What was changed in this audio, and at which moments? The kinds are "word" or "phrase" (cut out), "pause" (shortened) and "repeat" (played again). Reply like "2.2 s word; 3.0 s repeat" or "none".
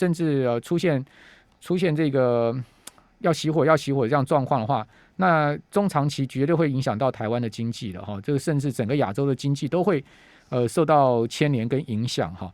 none